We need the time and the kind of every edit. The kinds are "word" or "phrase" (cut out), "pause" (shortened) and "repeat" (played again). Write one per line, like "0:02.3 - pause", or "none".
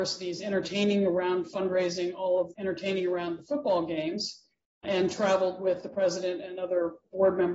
0:02.5 - word
0:04.8 - word